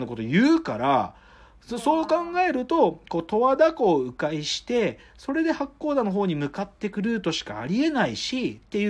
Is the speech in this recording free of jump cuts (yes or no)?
yes